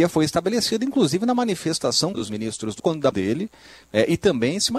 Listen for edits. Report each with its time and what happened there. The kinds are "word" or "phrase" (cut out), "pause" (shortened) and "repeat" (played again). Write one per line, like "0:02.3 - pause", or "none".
0:02.1 - word
0:02.8 - word
0:03.1 - word